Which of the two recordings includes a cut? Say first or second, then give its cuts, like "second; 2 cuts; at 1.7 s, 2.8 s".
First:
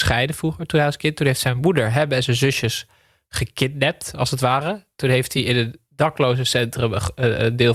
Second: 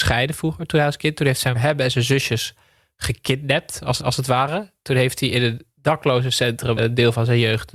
second; 3 cuts; at 1.5 s, 4.0 s, 6.8 s